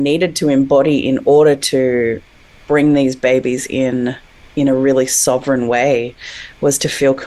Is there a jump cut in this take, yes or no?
no